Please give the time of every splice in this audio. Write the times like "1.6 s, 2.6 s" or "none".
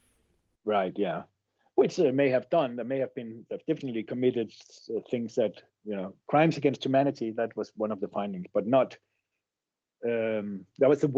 none